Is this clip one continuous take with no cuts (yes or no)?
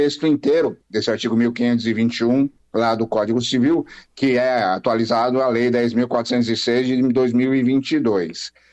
yes